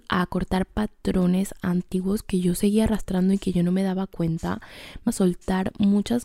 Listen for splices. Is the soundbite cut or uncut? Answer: cut